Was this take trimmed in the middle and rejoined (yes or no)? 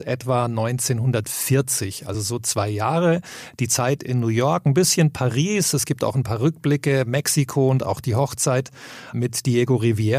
no